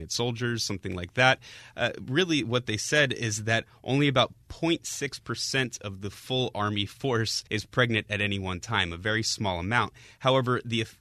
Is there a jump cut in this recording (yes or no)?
yes